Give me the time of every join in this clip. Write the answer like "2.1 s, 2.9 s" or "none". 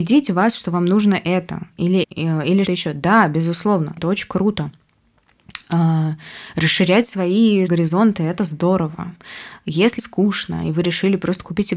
2.0 s, 2.6 s, 4.0 s, 7.7 s, 10.0 s